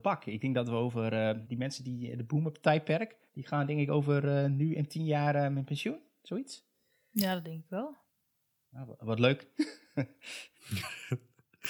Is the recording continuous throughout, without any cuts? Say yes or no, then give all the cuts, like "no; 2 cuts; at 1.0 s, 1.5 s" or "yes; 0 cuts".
no; 2 cuts; at 1.4 s, 3.3 s